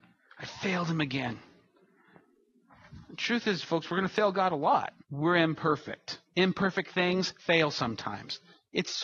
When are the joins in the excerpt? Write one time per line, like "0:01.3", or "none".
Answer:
0:05.0
0:06.3
0:07.4